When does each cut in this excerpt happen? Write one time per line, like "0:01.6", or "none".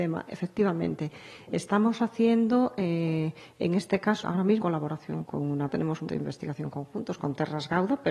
0:04.2
0:04.6
0:05.3
0:05.7
0:06.1

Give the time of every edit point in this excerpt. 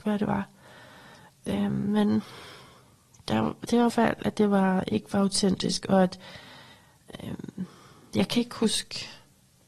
0:03.9

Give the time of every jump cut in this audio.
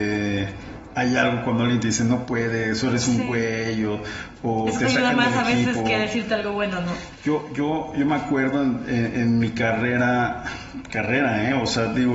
none

